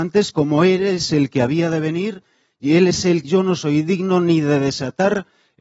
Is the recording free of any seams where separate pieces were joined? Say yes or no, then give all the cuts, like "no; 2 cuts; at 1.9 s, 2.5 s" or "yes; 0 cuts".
no; 1 cut; at 3.2 s